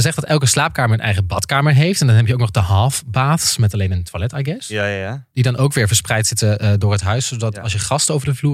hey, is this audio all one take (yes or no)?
yes